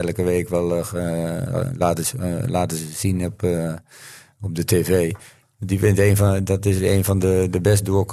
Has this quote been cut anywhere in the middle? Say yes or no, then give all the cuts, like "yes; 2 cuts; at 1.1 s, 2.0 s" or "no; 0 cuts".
no; 0 cuts